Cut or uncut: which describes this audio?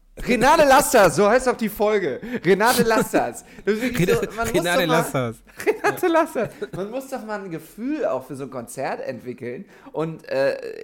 uncut